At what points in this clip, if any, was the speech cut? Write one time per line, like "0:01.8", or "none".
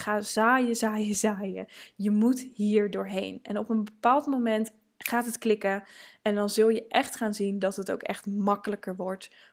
none